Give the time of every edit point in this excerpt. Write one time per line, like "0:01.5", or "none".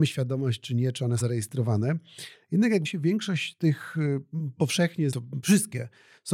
0:01.2
0:02.8
0:05.1
0:05.4